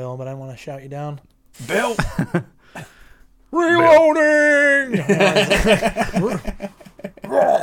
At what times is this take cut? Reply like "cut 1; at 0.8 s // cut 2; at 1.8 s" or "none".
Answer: none